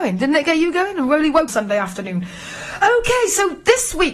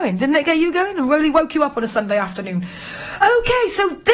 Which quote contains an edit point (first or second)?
first